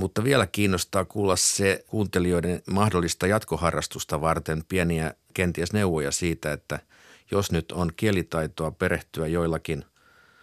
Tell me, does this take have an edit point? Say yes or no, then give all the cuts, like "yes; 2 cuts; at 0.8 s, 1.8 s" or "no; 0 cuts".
no; 0 cuts